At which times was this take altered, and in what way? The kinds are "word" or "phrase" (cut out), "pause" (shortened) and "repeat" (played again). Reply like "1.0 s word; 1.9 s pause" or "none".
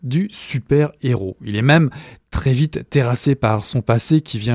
none